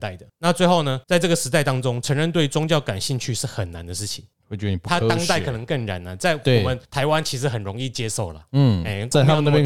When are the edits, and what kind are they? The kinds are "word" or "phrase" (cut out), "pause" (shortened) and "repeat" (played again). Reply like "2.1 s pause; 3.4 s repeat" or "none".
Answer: 1.0 s pause; 6.8 s pause